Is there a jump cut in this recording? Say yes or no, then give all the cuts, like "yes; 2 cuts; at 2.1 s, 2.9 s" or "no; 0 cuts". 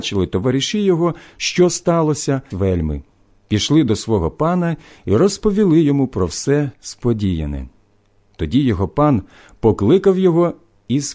yes; 1 cut; at 2.5 s